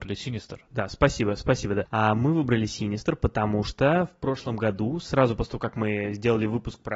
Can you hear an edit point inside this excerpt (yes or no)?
no